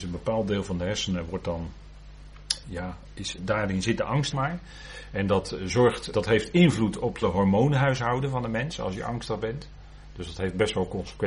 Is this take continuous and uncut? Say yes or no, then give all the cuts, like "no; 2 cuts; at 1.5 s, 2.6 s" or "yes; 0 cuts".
no; 5 cuts; at 2.6 s, 3.4 s, 4.3 s, 6.1 s, 7.2 s